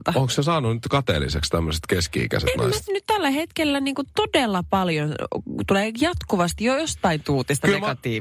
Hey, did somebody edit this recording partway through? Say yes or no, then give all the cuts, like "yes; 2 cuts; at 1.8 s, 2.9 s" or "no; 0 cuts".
yes; 1 cut; at 2.9 s